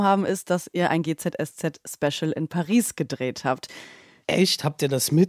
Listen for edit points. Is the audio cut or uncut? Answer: uncut